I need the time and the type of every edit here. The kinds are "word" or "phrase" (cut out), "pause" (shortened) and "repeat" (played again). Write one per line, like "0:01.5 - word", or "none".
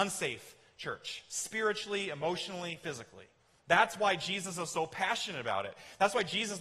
none